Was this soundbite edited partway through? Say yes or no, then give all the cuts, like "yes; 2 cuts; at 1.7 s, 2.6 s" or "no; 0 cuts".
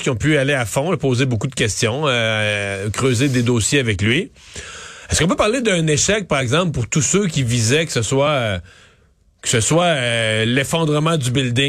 no; 0 cuts